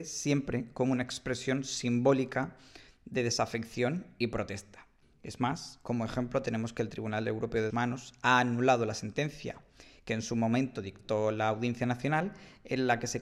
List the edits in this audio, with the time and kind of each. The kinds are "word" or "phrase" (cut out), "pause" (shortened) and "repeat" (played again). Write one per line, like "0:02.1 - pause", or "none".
0:05.0 - pause
0:07.7 - word